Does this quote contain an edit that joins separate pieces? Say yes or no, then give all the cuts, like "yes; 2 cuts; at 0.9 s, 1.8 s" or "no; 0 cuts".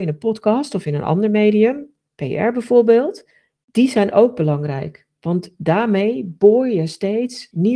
no; 0 cuts